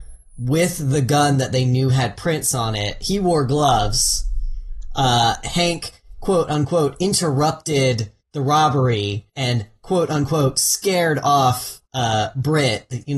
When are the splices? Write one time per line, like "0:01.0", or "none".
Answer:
0:08.2
0:09.3
0:11.9